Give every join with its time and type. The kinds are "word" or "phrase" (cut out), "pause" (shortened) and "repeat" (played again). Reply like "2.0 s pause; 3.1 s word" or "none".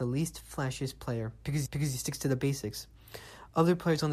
1.7 s repeat